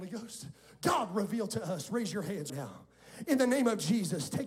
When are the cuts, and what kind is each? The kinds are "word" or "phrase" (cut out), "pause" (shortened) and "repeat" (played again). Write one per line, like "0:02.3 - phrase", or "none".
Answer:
0:02.5 - word